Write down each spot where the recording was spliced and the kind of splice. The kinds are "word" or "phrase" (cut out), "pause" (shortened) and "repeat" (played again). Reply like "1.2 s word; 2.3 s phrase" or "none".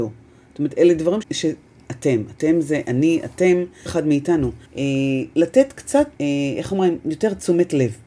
1.2 s word; 3.9 s word; 4.7 s pause; 6.1 s pause